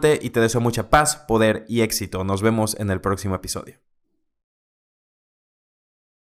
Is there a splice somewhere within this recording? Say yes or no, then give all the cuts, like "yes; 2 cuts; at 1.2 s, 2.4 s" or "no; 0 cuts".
no; 0 cuts